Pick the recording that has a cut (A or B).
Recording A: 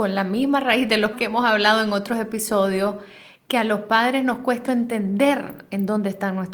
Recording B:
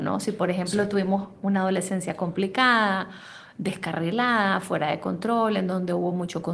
A